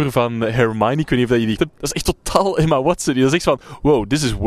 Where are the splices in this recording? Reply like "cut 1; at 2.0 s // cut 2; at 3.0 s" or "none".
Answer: cut 1; at 1.6 s